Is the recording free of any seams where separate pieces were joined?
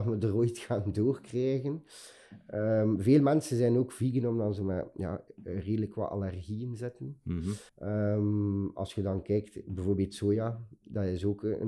no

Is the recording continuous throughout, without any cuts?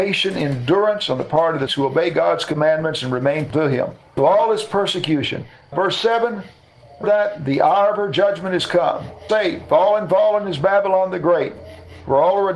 no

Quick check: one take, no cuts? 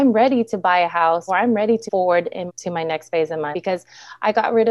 no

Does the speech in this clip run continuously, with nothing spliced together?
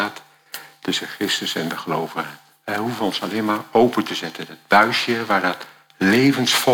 yes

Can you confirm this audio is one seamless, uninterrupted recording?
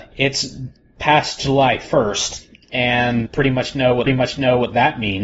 no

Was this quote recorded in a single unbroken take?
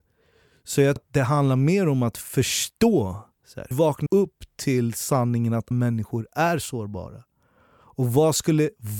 no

